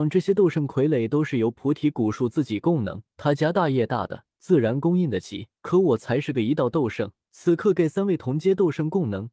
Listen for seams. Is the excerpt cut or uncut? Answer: cut